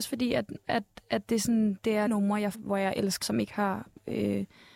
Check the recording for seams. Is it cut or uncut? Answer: cut